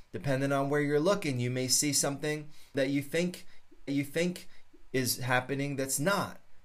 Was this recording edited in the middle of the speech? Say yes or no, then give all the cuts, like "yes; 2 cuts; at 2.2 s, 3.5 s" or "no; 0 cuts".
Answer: yes; 2 cuts; at 2.7 s, 3.9 s